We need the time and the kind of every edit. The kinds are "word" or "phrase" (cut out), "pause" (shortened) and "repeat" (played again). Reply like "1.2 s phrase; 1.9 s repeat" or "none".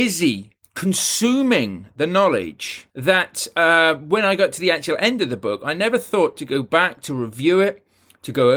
2.9 s pause